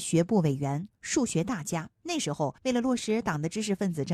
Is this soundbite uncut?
no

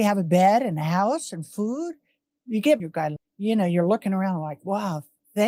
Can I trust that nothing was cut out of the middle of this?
no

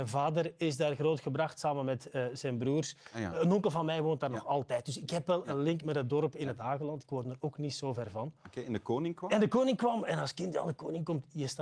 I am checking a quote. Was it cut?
no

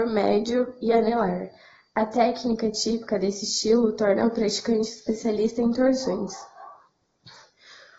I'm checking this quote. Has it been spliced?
no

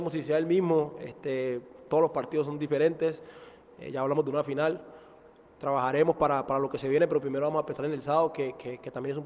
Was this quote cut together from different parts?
no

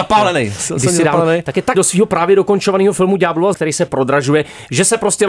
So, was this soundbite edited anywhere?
yes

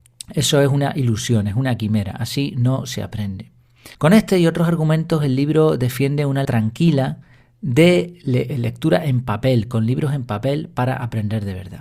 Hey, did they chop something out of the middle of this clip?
yes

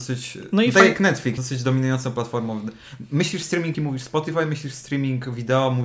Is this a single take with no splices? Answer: no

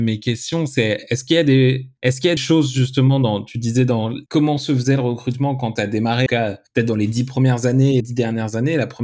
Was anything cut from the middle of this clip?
yes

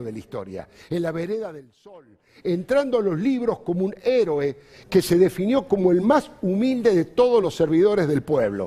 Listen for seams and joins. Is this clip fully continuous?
yes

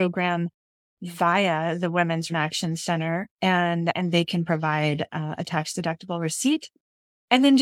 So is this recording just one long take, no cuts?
no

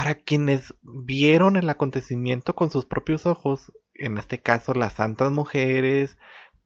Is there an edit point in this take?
no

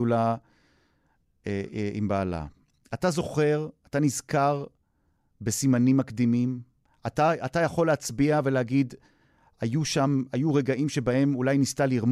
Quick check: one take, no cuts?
yes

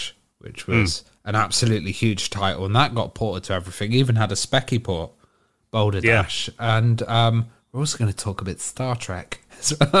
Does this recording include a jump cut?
no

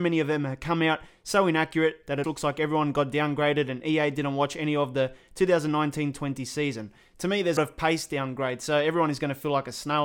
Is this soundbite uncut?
no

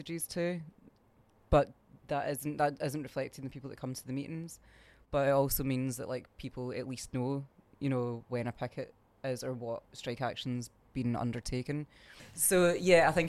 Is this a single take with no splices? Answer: yes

